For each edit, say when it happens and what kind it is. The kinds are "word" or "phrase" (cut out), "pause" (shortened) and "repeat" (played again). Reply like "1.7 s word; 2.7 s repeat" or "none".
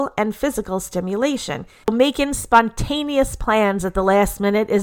none